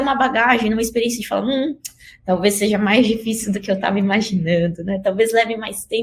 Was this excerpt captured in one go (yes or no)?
yes